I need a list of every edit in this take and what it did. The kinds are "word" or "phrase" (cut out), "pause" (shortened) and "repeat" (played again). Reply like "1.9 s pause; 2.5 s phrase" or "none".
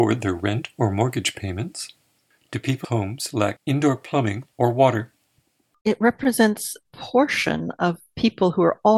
2.8 s word; 3.6 s word; 6.9 s phrase